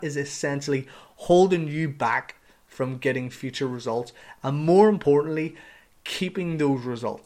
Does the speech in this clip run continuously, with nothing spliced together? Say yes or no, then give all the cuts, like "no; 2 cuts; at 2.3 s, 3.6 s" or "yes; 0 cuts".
yes; 0 cuts